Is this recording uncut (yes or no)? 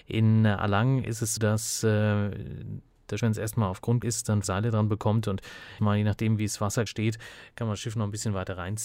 no